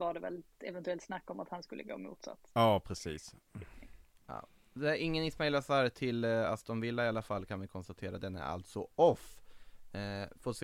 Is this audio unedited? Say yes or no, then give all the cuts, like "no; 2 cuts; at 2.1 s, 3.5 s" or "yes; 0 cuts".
yes; 0 cuts